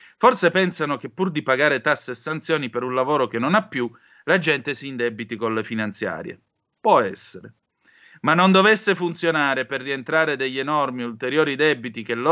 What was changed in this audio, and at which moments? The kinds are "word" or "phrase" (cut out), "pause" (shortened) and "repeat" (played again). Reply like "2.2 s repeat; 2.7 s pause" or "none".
none